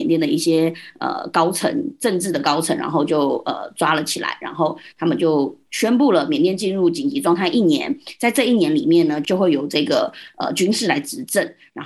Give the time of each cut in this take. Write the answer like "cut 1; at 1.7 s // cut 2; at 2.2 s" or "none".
none